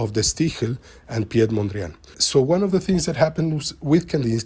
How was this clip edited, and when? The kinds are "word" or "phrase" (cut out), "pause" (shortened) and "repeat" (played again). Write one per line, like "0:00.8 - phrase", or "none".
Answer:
0:02.1 - word